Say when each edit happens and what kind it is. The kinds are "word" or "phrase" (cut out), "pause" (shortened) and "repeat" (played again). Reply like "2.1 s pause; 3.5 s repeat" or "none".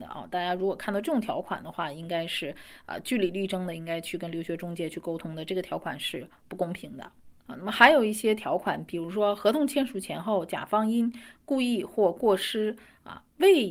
none